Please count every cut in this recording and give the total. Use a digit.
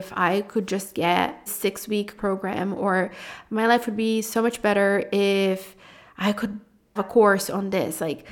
3